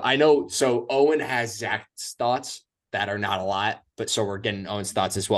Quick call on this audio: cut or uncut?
uncut